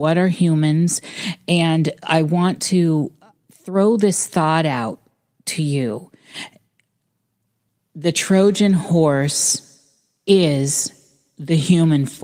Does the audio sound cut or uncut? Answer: uncut